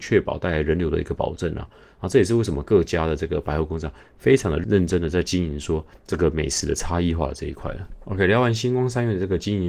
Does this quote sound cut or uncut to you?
uncut